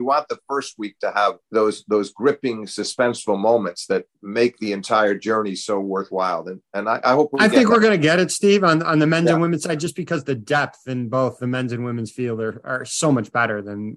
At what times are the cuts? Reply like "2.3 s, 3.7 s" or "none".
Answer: 1.4 s, 4.1 s

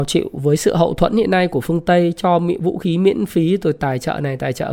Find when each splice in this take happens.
none

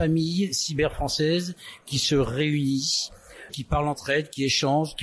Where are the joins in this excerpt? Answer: 3.5 s

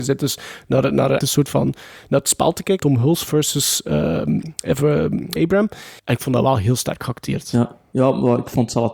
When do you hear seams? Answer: 1.2 s, 2.8 s, 5.4 s, 6.0 s

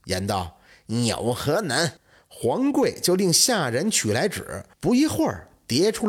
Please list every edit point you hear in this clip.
2.0 s, 4.7 s

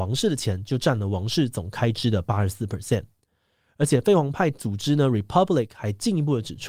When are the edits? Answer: none

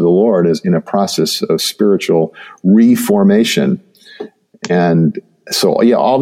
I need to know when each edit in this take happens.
none

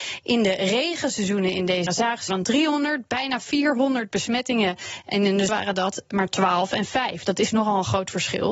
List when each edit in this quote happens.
1.9 s, 2.3 s, 5.5 s

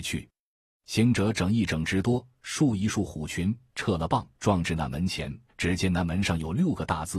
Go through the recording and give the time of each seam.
4.3 s, 5.5 s

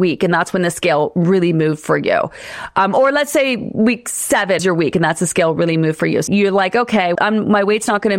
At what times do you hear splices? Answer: 4.6 s, 6.3 s, 7.2 s

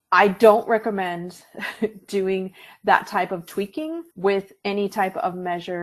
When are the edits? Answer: 4.1 s

